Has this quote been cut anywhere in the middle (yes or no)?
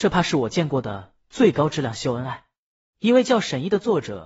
no